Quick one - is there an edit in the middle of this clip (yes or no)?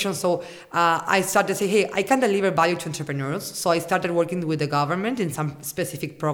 no